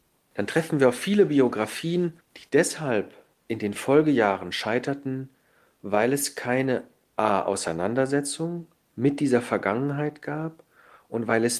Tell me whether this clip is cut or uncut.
uncut